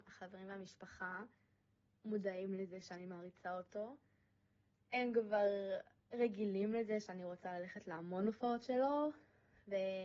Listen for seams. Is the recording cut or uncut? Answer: uncut